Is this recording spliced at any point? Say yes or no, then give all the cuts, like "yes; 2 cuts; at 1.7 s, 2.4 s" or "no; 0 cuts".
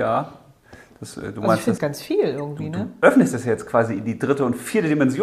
yes; 1 cut; at 1.8 s